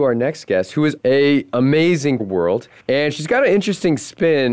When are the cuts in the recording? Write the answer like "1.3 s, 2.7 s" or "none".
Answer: 1.0 s, 2.2 s, 2.8 s